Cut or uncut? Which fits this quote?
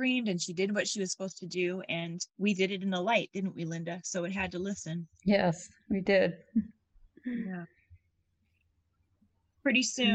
cut